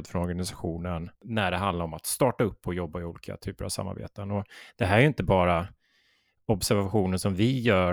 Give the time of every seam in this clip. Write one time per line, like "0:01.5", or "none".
0:01.1